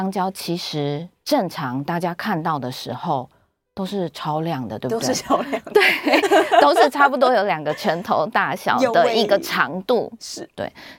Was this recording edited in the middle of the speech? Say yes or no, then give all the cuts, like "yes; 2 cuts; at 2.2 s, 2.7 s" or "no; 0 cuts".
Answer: no; 0 cuts